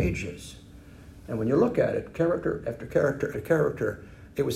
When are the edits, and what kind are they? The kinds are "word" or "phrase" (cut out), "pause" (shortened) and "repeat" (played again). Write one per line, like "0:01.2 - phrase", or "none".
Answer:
0:03.3 - word